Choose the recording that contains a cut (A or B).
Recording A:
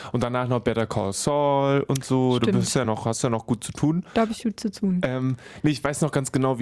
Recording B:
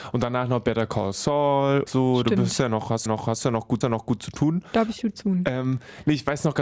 B